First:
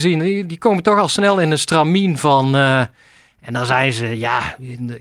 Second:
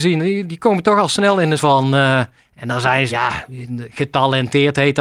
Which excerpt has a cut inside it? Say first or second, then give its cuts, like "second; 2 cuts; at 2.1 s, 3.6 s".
second; 3 cuts; at 1.6 s, 2.4 s, 3.1 s